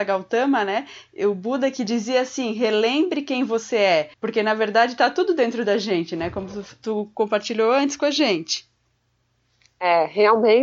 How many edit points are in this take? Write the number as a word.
one